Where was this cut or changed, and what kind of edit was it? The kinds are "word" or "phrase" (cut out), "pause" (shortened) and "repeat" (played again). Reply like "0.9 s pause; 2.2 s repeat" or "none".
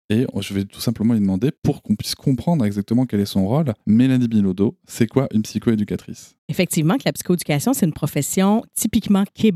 1.6 s pause; 3.8 s pause; 6.4 s pause